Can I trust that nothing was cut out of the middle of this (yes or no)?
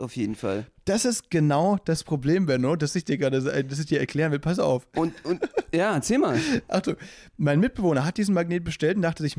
yes